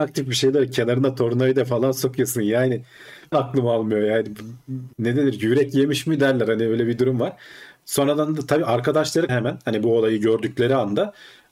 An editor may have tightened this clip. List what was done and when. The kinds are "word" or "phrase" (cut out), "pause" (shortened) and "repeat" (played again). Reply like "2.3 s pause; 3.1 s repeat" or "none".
3.3 s word; 4.9 s pause; 9.3 s word